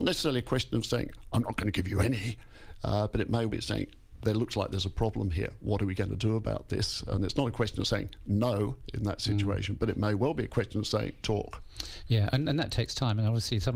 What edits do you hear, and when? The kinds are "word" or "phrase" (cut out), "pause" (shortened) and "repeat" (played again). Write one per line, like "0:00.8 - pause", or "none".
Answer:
0:03.5 - word
0:11.2 - phrase